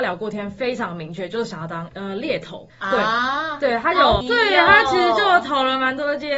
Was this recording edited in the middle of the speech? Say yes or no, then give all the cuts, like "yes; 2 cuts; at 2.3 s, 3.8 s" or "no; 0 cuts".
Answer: yes; 3 cuts; at 1.9 s, 2.7 s, 4.2 s